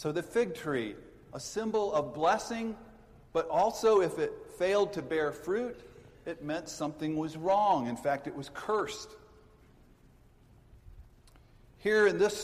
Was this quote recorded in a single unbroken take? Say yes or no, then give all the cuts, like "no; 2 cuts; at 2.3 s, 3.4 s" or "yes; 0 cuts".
yes; 0 cuts